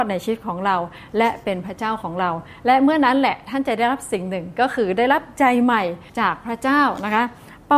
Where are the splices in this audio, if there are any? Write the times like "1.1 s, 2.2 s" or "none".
6.1 s